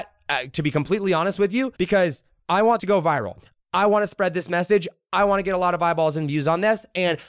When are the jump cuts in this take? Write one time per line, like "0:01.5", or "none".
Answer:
0:01.8
0:02.8